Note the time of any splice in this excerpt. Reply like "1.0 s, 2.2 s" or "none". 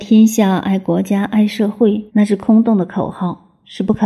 2.1 s